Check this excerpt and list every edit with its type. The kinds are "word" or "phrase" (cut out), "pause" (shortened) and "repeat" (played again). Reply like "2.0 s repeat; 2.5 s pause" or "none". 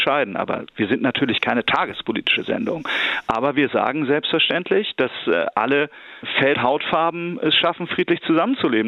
6.5 s word